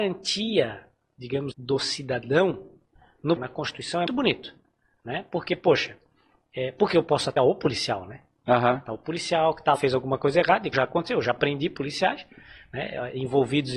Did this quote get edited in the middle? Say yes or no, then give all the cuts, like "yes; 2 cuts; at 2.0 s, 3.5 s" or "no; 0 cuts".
yes; 6 cuts; at 1.5 s, 3.4 s, 4.1 s, 7.4 s, 9.8 s, 10.7 s